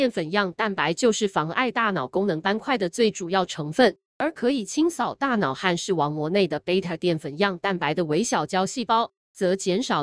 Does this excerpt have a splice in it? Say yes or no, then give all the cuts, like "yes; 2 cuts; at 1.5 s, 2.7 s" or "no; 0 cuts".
yes; 1 cut; at 4.1 s